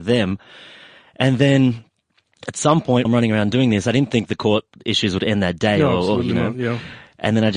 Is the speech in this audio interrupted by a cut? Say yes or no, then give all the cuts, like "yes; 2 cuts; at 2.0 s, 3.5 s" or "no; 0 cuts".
yes; 1 cut; at 3.0 s